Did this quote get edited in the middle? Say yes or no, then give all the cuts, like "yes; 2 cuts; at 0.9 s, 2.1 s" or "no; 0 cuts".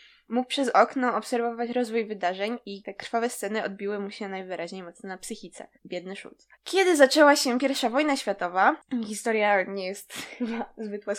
yes; 2 cuts; at 5.8 s, 6.5 s